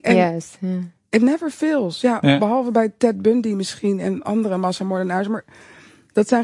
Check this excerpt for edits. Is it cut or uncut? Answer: uncut